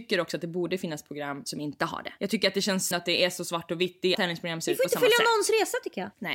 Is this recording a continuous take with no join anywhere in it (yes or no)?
no